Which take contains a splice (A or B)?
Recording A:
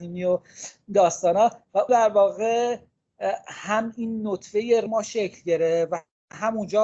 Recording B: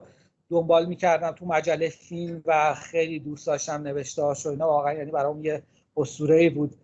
A